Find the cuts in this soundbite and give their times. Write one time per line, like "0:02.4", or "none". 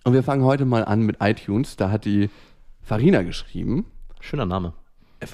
none